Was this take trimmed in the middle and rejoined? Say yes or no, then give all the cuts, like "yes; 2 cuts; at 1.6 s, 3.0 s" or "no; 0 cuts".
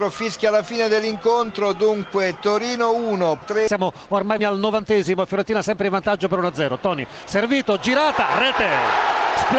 yes; 2 cuts; at 3.4 s, 4.4 s